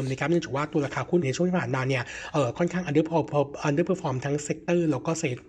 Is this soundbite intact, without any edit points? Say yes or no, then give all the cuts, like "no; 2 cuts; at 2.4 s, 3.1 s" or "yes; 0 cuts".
no; 1 cut; at 1.2 s